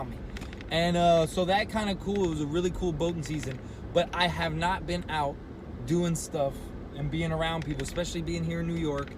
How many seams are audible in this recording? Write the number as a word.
zero